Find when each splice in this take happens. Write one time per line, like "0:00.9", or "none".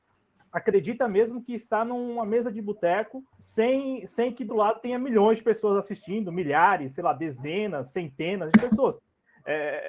0:03.3
0:04.5